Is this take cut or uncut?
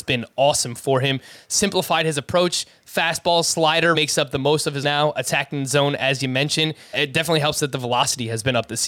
cut